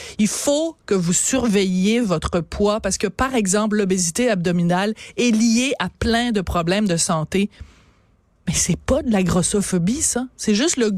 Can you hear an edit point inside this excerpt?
no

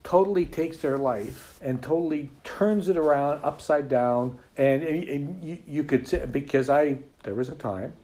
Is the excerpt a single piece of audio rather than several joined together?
no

